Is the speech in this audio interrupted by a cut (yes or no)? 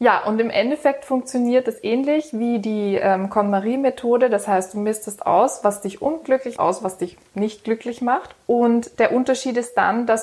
yes